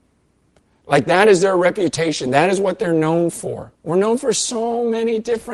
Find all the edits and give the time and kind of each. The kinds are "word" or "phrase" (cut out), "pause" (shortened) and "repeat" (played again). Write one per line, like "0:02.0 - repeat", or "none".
0:03.7 - pause